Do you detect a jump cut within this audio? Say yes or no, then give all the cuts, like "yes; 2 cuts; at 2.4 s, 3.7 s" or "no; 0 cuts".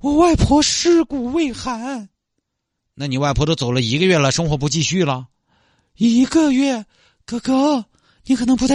no; 0 cuts